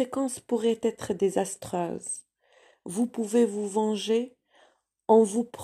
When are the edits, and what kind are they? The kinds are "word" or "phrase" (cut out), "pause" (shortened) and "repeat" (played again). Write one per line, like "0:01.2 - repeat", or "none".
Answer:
none